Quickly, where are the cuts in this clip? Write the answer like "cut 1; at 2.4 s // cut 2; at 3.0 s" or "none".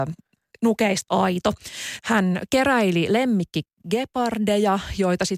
cut 1; at 1.1 s